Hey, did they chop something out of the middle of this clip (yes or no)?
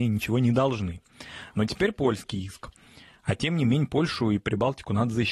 no